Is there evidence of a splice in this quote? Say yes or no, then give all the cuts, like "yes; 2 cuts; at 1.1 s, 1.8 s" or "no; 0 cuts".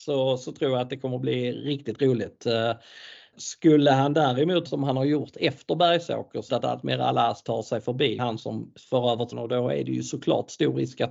yes; 5 cuts; at 3.3 s, 4.7 s, 6.5 s, 8.2 s, 9.3 s